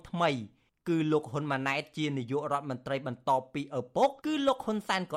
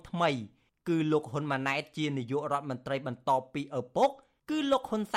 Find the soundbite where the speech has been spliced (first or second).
first